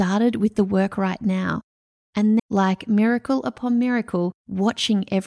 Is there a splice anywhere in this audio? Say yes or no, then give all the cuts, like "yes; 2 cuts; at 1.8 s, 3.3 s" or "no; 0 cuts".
yes; 2 cuts; at 2.4 s, 4.4 s